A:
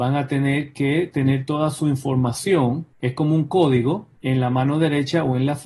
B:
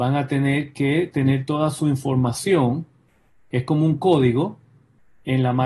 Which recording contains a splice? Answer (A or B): A